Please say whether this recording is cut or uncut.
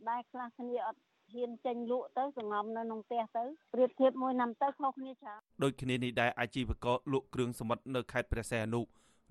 cut